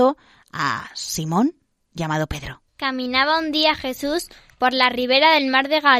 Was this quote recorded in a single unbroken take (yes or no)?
no